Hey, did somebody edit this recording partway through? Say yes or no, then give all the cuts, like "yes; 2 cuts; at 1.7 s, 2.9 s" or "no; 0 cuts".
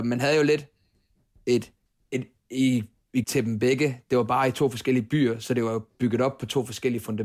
yes; 2 cuts; at 1.9 s, 3.2 s